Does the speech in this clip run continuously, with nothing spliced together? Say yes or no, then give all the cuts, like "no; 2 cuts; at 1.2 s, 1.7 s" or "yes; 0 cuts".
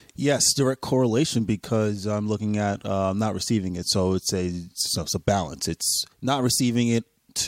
no; 1 cut; at 6.1 s